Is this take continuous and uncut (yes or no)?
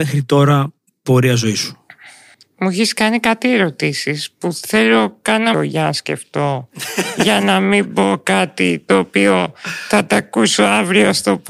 no